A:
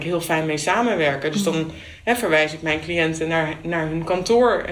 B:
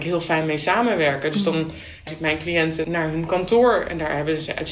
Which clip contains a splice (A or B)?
B